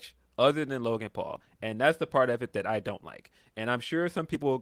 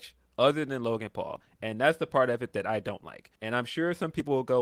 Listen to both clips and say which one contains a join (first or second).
second